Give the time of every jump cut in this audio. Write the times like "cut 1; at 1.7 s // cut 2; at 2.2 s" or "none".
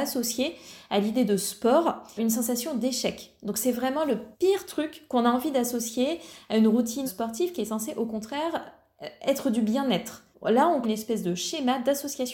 cut 1; at 2.2 s // cut 2; at 4.3 s // cut 3; at 7.1 s // cut 4; at 10.3 s // cut 5; at 10.8 s